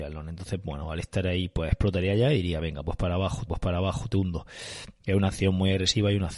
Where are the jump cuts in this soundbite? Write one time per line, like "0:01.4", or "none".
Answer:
0:03.5

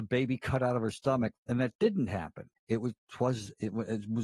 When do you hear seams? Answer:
0:01.4
0:02.6

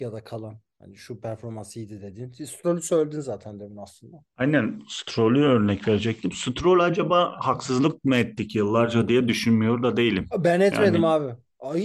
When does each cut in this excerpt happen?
0:04.3

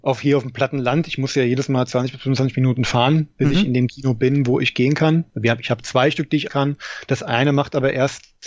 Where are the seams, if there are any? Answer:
0:05.3
0:06.5

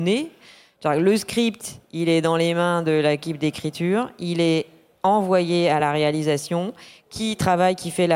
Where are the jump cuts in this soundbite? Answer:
none

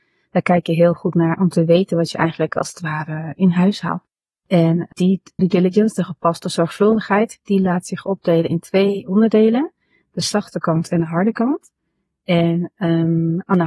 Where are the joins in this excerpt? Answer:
0:04.9
0:05.4

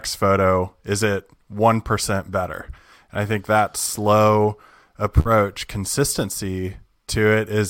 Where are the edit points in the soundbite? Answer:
none

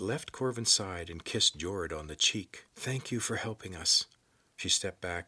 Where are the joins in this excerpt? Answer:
0:02.7

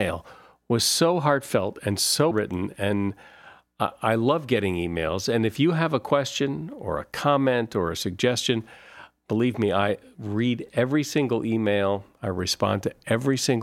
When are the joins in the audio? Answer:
0:02.3

